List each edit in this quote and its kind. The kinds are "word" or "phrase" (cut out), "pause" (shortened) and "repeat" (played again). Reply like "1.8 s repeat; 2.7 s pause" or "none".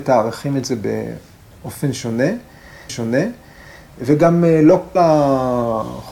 2.9 s repeat; 5.0 s word